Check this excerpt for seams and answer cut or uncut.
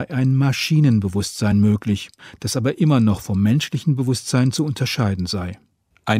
uncut